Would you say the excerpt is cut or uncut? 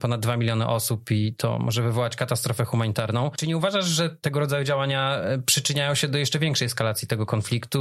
uncut